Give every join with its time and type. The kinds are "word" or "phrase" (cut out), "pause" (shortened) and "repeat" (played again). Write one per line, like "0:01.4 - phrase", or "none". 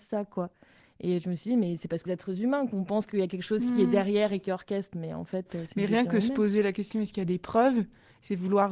0:02.1 - word